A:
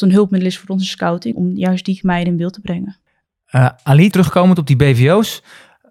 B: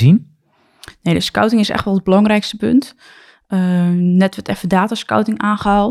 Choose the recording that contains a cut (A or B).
A